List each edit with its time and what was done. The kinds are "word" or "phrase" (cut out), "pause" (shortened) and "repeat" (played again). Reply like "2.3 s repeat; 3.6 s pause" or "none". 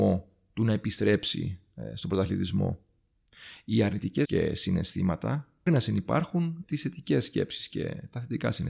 4.2 s word; 5.7 s word; 6.6 s word